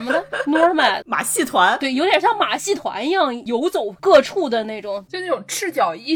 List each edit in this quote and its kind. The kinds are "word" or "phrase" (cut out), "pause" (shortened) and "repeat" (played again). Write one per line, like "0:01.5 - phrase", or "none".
0:01.0 - word